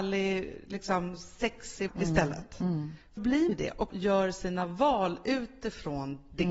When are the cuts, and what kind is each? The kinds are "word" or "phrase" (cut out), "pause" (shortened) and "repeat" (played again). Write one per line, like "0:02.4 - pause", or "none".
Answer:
0:01.9 - word
0:03.2 - word
0:03.5 - word
0:03.9 - phrase